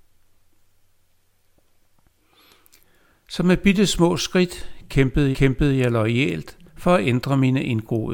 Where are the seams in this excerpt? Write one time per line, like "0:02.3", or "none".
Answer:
0:05.3
0:06.7